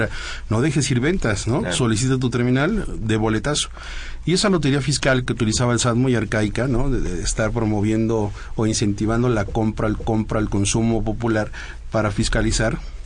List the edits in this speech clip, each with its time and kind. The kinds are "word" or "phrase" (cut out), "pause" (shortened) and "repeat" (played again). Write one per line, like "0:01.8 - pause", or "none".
0:05.3 - phrase
0:10.0 - repeat